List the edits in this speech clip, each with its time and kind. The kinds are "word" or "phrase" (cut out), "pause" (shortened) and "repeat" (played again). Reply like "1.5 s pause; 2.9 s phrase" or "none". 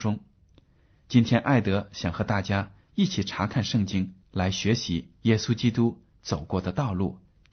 4.2 s pause